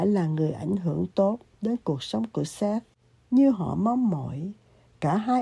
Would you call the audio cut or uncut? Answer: uncut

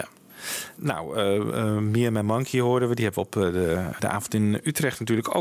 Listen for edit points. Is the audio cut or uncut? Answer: cut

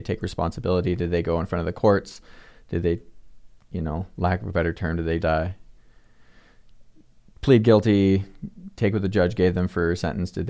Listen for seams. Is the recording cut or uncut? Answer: cut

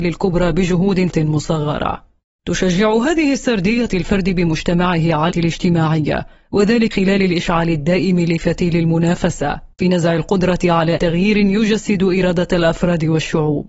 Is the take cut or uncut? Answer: cut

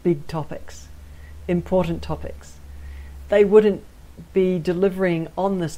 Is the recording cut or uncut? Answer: uncut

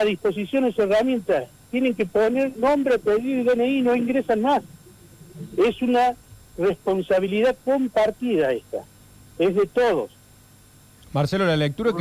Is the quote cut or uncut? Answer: uncut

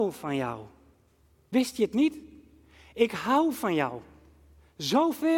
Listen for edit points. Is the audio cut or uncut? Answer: uncut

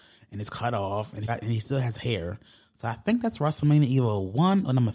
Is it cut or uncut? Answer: cut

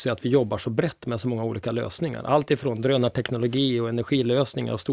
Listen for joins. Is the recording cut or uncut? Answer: uncut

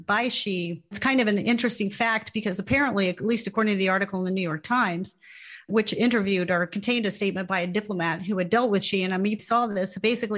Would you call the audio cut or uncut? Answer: cut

